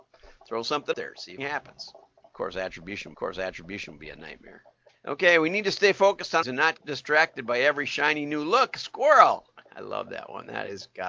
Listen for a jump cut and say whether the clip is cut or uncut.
cut